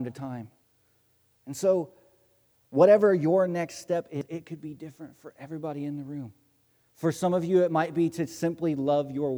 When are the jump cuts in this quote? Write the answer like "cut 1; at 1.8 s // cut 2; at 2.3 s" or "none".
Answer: none